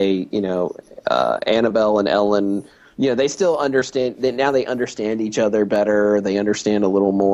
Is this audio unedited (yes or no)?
yes